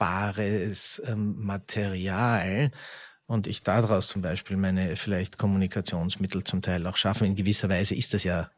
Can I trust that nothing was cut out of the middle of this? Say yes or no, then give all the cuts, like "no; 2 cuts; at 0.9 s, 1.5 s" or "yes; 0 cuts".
yes; 0 cuts